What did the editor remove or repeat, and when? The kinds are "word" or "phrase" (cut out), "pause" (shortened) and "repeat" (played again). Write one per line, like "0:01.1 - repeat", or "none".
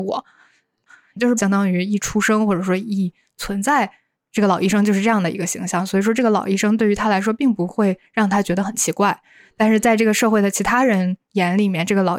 0:01.4 - word